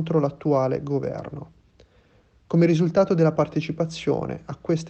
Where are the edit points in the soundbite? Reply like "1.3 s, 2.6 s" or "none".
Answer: none